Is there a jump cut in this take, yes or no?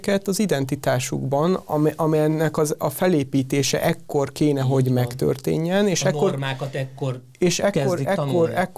no